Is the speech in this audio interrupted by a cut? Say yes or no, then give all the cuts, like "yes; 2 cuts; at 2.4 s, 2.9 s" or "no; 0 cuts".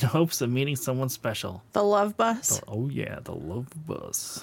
yes; 1 cut; at 1.7 s